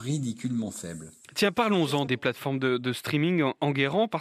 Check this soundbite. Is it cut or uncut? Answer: cut